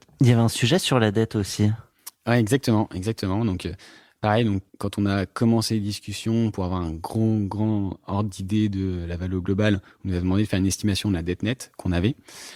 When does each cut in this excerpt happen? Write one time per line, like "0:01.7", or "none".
0:04.7